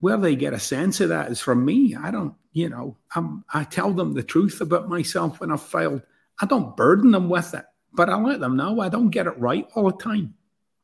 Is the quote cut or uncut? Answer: uncut